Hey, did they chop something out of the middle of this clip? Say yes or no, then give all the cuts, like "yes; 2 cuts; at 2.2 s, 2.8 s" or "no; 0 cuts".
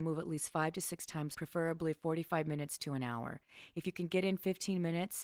yes; 1 cut; at 1.3 s